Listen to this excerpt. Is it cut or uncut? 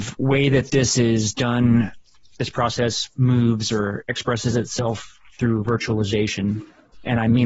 uncut